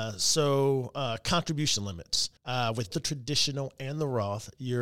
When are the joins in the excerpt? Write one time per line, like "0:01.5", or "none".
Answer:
0:02.4
0:02.9